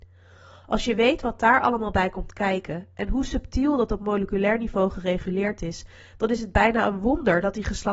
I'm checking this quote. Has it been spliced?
no; 0 cuts

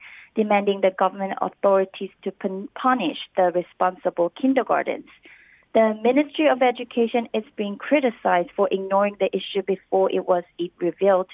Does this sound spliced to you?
no; 0 cuts

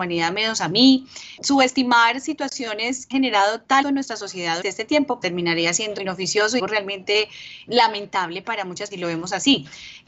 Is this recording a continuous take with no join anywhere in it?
no; 9 cuts; at 1.4 s, 3.1 s, 3.8 s, 4.6 s, 5.2 s, 6.0 s, 6.6 s, 7.7 s, 8.9 s

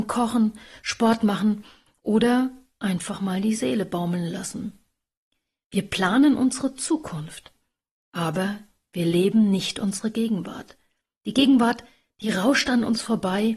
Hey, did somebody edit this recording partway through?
no; 0 cuts

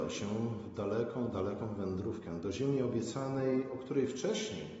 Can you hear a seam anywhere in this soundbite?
no; 0 cuts

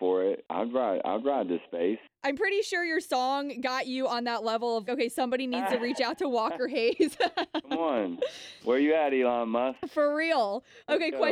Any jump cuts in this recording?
yes; 1 cut; at 4.9 s

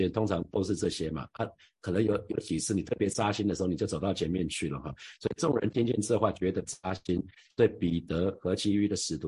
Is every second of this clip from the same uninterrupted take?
yes; 0 cuts

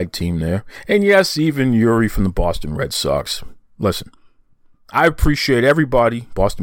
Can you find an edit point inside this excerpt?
no; 0 cuts

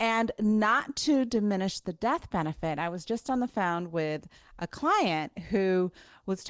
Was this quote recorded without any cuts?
yes; 0 cuts

